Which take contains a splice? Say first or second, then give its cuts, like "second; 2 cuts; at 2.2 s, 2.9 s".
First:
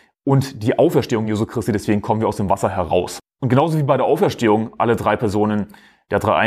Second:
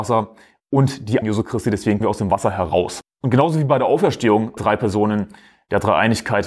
second; 3 cuts; at 1.2 s, 2.0 s, 4.6 s